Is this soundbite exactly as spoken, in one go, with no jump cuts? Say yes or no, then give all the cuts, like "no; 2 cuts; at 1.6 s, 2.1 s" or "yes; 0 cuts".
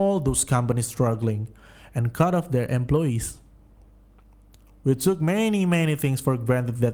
yes; 0 cuts